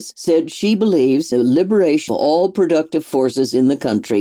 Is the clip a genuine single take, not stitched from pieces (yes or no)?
no